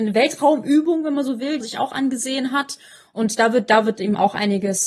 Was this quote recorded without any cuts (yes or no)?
no